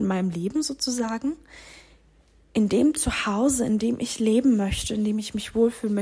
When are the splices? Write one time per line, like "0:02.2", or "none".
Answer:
none

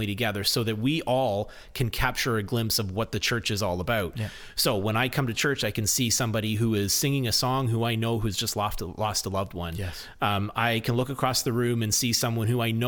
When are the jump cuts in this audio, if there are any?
none

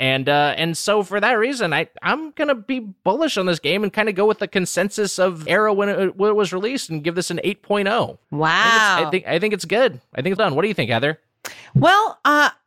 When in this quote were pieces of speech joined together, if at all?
0:05.5
0:08.2
0:10.4

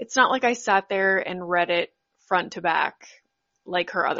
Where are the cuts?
none

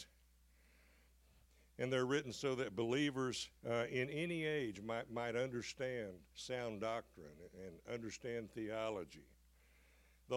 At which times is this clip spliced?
0:03.6
0:06.3

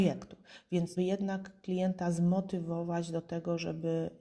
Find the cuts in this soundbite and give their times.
0:01.0

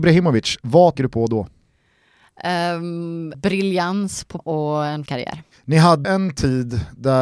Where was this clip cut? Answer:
0:01.0
0:03.3
0:04.4
0:05.1
0:06.0

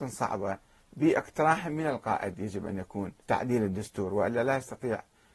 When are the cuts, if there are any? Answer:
0:03.2

